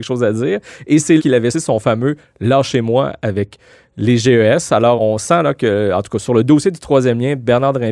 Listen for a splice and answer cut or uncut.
cut